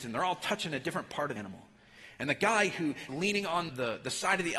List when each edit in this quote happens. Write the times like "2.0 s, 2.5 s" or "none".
1.4 s, 3.1 s, 3.7 s

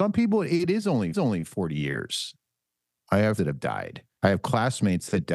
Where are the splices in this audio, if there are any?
1.1 s, 3.4 s, 4.1 s

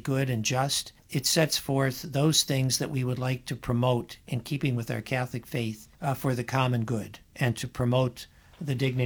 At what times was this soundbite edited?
1.0 s, 5.9 s

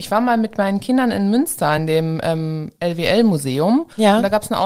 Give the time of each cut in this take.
none

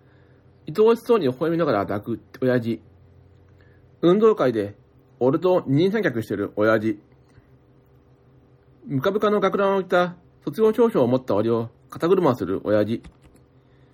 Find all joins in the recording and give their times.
none

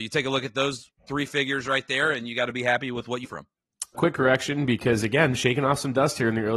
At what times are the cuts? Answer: 1.0 s, 3.2 s, 3.9 s

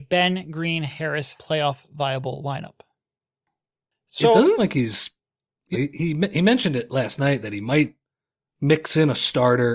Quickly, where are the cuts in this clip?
1.4 s, 4.6 s, 5.7 s

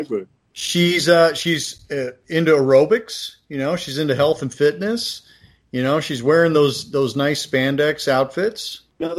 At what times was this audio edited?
none

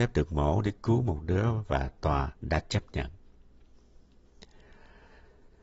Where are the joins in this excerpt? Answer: 2.4 s

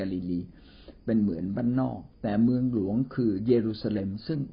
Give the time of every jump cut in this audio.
2.1 s

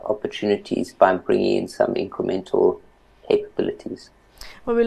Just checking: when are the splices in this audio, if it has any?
none

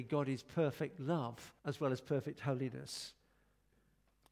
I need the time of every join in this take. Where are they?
1.6 s

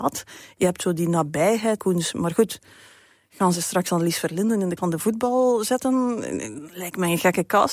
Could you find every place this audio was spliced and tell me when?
1.8 s, 4.8 s

